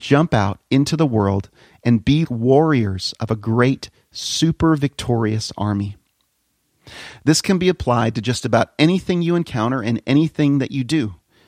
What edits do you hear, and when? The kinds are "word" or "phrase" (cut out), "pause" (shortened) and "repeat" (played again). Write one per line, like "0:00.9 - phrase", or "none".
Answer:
0:02.2 - word